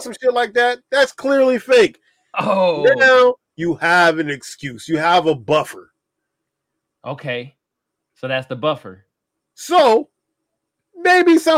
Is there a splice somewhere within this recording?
no; 0 cuts

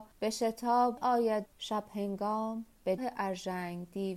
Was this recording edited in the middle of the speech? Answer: yes; 3 cuts; at 1.0 s, 1.4 s, 3.0 s

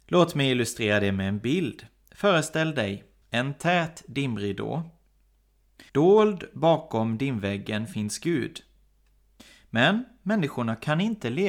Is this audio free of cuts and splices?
no; 2 cuts; at 3.2 s, 5.9 s

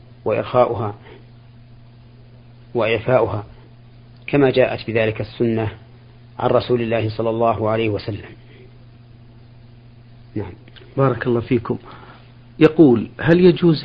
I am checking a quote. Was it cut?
no; 0 cuts

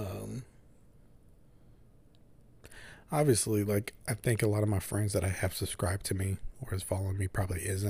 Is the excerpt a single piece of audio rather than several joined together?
yes; 0 cuts

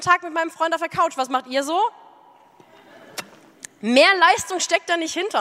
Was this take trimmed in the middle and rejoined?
no; 0 cuts

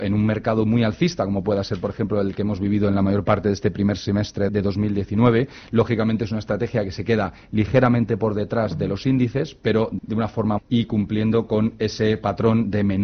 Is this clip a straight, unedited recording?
no; 3 cuts; at 4.5 s, 10.0 s, 10.6 s

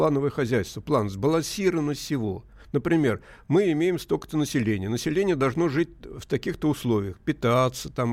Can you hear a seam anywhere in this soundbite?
no; 0 cuts

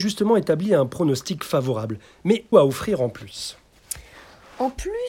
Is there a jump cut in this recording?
yes; 1 cut; at 2.5 s

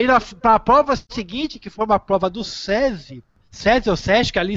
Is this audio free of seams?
yes; 0 cuts

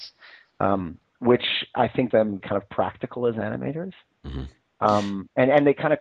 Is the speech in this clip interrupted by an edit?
yes; 3 cuts; at 1.7 s, 2.1 s, 2.4 s

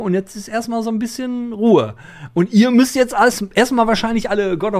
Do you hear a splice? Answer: no; 0 cuts

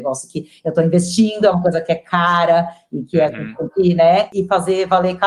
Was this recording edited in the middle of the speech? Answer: no; 0 cuts

